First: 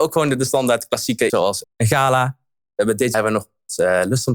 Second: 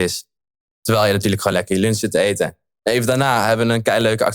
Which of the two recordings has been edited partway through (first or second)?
first